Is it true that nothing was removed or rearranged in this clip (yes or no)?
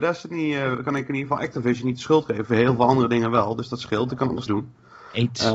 no